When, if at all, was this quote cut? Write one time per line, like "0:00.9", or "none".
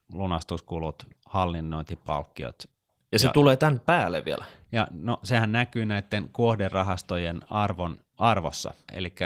0:01.2